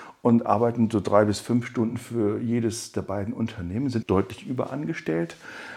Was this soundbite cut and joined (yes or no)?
yes